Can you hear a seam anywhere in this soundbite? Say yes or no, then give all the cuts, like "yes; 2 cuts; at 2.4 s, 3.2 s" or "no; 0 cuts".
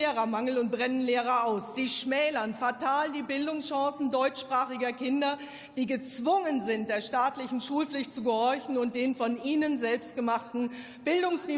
no; 0 cuts